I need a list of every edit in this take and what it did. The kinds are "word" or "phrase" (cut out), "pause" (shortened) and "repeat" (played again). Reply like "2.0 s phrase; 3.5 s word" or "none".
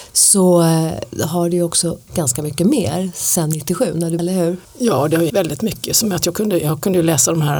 2.1 s word; 4.2 s word; 4.6 s pause; 5.3 s word; 6.2 s word